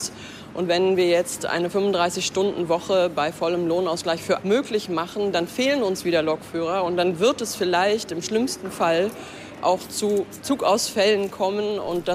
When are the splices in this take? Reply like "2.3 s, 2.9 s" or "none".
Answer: 4.4 s